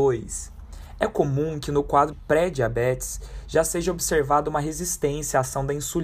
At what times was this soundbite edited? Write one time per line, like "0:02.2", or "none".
0:02.1